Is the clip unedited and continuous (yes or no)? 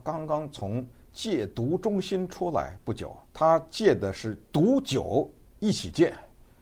no